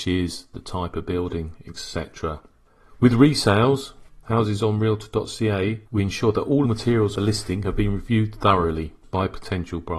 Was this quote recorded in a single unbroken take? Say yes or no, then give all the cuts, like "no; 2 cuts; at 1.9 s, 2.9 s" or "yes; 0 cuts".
no; 3 cuts; at 5.8 s, 6.6 s, 7.1 s